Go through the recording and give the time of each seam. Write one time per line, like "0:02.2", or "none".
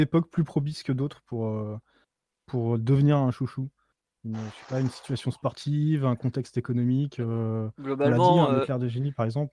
none